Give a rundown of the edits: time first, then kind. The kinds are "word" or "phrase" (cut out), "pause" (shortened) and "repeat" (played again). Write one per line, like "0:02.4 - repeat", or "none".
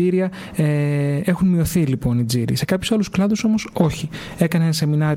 none

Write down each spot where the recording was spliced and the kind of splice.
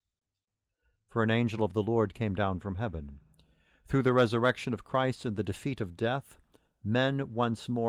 none

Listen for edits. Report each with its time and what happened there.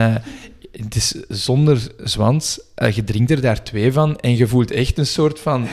none

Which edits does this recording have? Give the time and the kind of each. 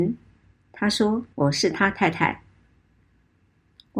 0:01.3 - pause

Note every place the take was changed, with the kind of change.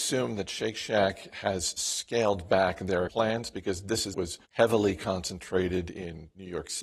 0:03.1 - word
0:04.1 - phrase
0:04.4 - pause

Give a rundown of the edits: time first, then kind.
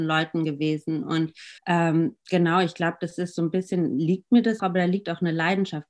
0:01.6 - pause
0:04.6 - word

